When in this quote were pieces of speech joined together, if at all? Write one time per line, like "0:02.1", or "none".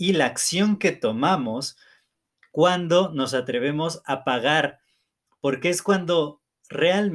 none